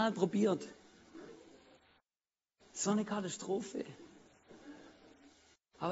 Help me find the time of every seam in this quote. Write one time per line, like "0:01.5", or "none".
none